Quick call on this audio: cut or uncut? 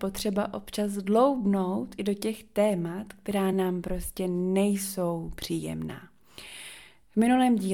uncut